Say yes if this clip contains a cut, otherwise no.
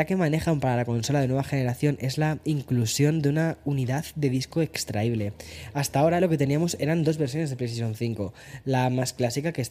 no